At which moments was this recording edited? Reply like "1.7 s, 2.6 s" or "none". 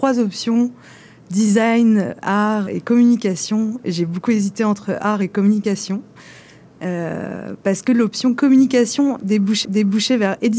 2.7 s, 7.6 s, 9.6 s

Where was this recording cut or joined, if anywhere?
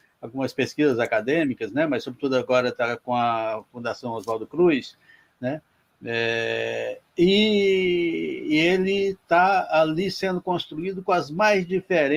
none

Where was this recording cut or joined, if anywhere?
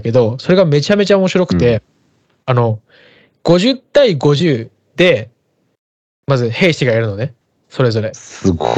none

